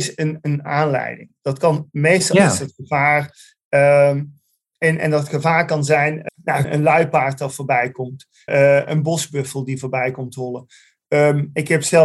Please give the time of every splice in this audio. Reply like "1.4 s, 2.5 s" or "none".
6.3 s, 6.6 s, 8.5 s